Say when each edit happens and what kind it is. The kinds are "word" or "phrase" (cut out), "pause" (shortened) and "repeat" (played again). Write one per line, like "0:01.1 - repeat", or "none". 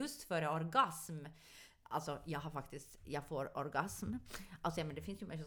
none